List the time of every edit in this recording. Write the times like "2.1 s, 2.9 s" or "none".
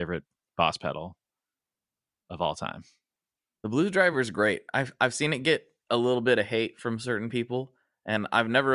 none